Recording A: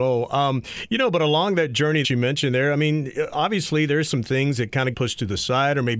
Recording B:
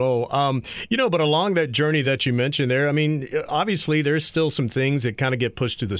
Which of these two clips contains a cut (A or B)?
A